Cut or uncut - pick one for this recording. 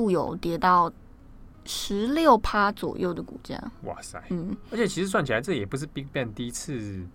uncut